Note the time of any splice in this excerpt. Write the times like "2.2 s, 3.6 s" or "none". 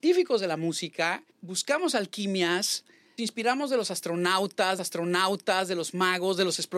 1.3 s, 3.2 s, 4.8 s